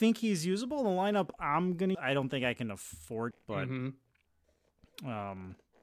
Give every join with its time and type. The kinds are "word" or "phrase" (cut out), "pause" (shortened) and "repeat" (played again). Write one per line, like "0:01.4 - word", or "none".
0:01.9 - word
0:03.3 - word